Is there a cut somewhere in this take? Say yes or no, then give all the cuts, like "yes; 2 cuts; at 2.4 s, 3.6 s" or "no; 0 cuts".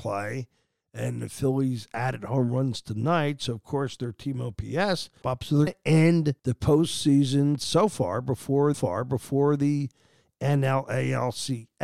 yes; 4 cuts; at 5.2 s, 5.7 s, 6.4 s, 8.7 s